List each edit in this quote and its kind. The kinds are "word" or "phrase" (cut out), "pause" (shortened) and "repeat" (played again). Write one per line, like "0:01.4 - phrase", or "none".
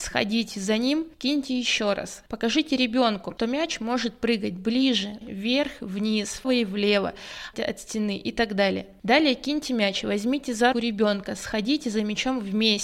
0:01.1 - pause
0:05.2 - word
0:06.4 - word
0:07.5 - word
0:10.7 - word